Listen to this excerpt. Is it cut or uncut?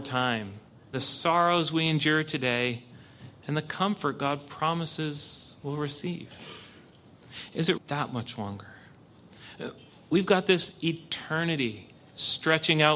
cut